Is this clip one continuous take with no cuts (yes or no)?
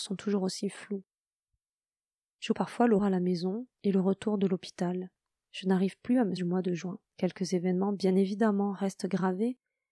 no